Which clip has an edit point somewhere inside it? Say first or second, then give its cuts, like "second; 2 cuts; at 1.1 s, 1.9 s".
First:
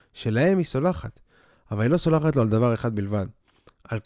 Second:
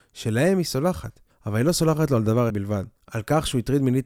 second; 3 cuts; at 1.3 s, 2.5 s, 3.0 s